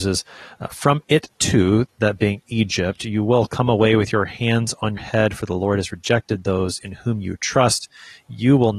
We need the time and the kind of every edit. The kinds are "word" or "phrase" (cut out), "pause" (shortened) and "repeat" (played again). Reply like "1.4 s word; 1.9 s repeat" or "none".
1.9 s word; 5.0 s word